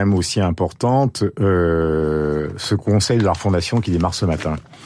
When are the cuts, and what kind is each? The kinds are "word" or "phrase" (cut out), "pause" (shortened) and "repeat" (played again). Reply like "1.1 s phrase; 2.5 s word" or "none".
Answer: none

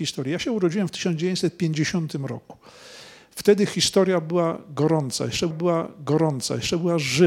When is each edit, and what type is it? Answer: 5.5 s repeat

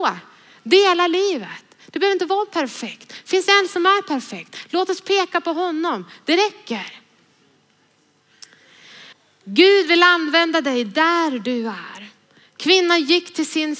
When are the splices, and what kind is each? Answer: 9.1 s pause

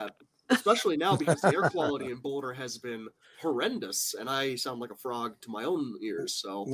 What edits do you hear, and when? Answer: none

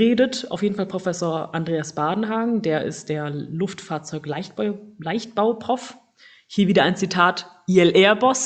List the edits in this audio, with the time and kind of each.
none

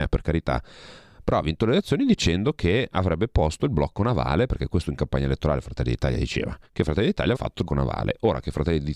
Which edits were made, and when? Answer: 6.7 s pause; 7.3 s word; 7.7 s word

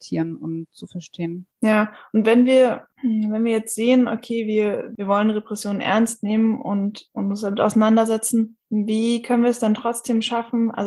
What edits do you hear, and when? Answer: 1.5 s pause; 2.9 s pause

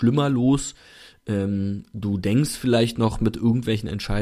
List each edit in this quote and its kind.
none

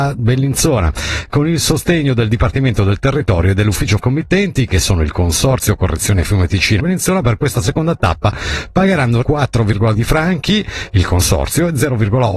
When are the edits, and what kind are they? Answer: 4.0 s phrase; 6.8 s phrase; 9.2 s word; 9.9 s word

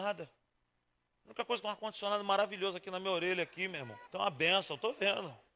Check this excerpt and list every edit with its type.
1.6 s phrase; 4.1 s pause

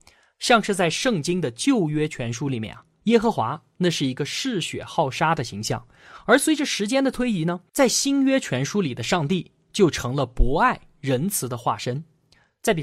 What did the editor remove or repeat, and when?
7.7 s pause

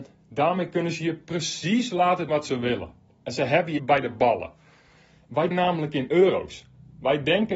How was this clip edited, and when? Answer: 2.3 s word; 3.1 s pause; 3.8 s word; 5.5 s word

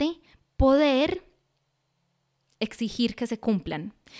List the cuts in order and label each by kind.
none

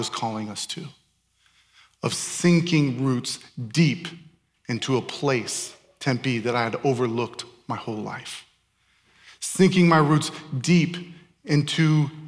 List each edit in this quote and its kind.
none

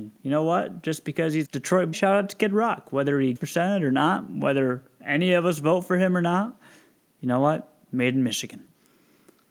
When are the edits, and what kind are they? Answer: 1.4 s word; 1.9 s word; 3.4 s word

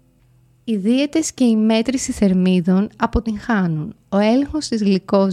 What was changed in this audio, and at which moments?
none

